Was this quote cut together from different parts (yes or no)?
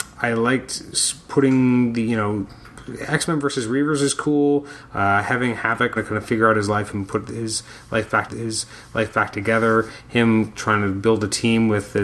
yes